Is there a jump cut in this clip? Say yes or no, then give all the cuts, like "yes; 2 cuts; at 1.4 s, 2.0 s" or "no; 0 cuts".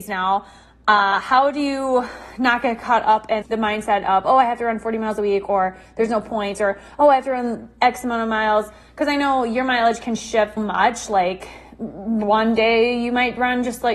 yes; 2 cuts; at 3.4 s, 10.6 s